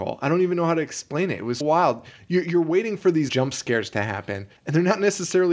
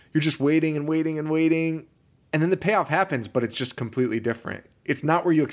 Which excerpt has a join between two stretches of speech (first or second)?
first